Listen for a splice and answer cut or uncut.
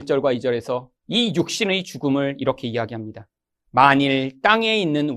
cut